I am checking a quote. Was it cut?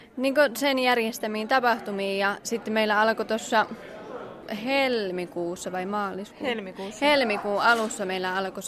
no; 0 cuts

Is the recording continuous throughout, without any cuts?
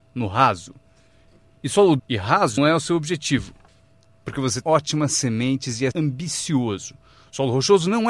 no; 4 cuts; at 2.0 s, 2.6 s, 4.6 s, 5.9 s

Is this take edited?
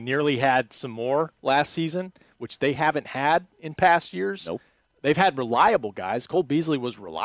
no; 0 cuts

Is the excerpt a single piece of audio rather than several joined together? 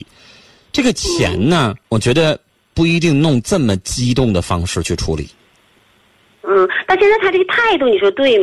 no; 1 cut; at 1.8 s

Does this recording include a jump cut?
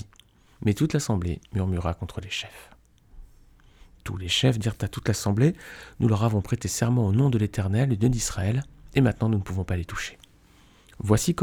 no; 0 cuts

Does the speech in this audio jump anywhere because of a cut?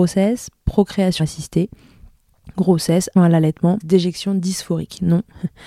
yes; 3 cuts; at 1.2 s, 3.2 s, 3.8 s

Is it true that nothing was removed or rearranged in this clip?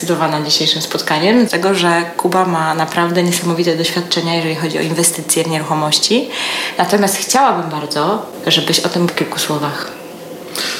no; 2 cuts; at 1.5 s, 9.1 s

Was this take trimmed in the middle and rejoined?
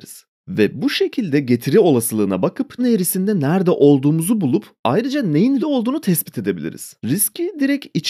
yes; 3 cuts; at 2.8 s, 5.6 s, 7.0 s

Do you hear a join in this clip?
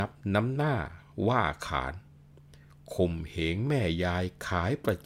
no; 0 cuts

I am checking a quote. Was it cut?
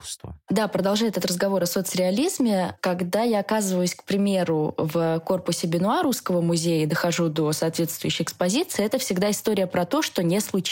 no; 0 cuts

